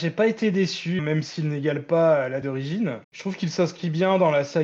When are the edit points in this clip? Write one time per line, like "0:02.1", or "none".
0:01.0
0:02.4
0:03.0